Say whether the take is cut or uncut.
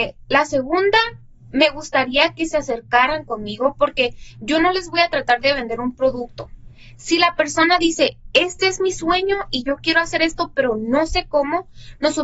uncut